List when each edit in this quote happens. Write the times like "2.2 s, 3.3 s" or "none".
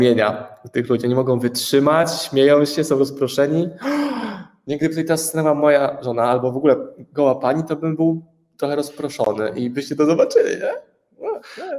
none